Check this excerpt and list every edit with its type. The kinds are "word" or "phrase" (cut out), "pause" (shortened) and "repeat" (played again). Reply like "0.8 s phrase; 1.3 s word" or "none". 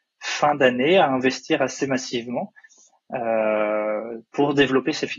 none